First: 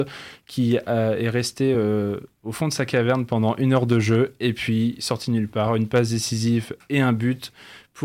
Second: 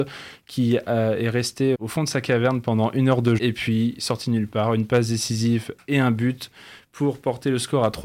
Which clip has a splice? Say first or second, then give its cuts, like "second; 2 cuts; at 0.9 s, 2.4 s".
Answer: second; 2 cuts; at 1.7 s, 3.4 s